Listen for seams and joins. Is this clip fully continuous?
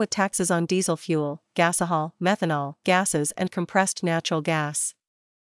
no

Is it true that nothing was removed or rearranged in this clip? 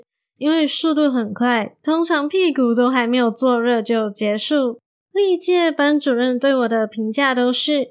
no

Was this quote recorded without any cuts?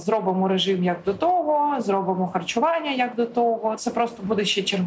yes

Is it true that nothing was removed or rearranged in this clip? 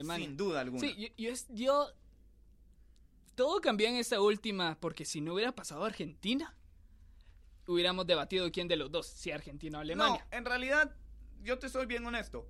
yes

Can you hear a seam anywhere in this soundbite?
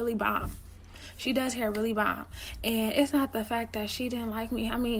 no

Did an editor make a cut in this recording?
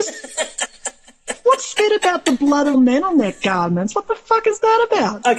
yes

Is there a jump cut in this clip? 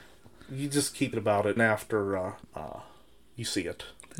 yes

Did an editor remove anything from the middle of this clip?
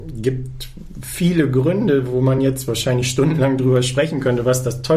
no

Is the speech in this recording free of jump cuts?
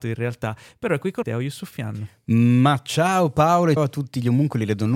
no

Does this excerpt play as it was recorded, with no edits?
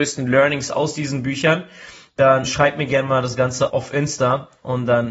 no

